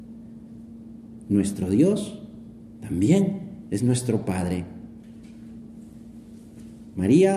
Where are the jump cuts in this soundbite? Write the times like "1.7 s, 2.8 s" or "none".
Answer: none